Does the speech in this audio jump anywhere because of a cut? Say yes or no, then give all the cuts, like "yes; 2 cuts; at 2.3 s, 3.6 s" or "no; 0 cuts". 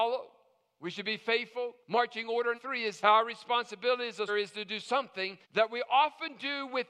yes; 5 cuts; at 1.8 s, 2.5 s, 3.0 s, 4.3 s, 5.4 s